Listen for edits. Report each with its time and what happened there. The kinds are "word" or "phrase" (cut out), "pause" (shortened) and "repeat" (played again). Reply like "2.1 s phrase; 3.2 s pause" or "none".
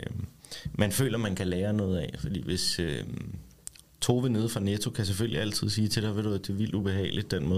none